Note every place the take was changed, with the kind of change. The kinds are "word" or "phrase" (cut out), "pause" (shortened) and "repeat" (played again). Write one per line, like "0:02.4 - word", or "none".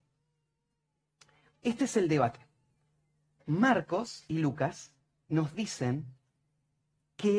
none

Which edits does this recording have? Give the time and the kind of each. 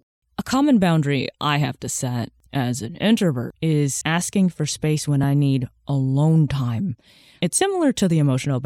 none

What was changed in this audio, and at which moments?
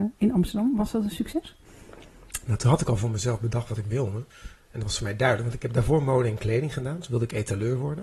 0:04.3 - pause

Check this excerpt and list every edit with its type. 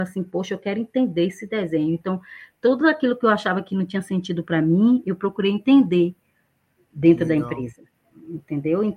none

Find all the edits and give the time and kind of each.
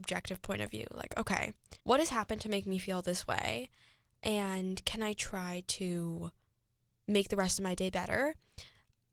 0:01.8 - pause

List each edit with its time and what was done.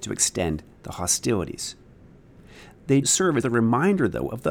0:03.0 - word
0:03.4 - word

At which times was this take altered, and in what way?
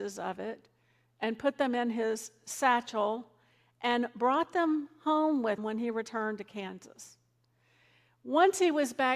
0:05.6 - word

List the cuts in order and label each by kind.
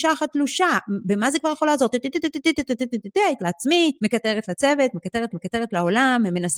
0:03.4 - word
0:04.0 - pause
0:05.3 - repeat

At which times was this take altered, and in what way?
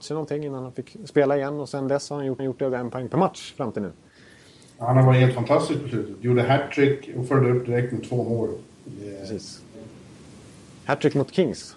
0:02.4 - repeat

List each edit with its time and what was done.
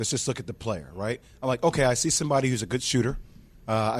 none

